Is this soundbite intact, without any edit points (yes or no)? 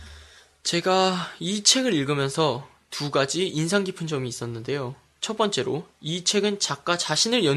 yes